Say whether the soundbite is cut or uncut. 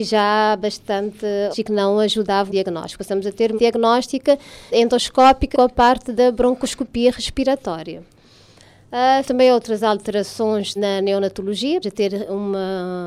cut